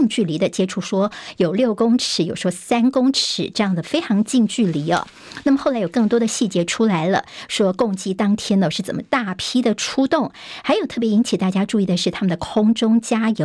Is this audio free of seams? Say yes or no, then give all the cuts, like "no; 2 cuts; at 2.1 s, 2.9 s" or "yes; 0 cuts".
yes; 0 cuts